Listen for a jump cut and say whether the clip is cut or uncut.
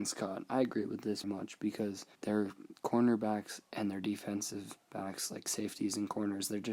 cut